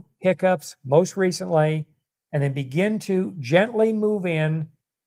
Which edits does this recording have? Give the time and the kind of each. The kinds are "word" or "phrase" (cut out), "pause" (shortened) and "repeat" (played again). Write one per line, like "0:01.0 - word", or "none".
none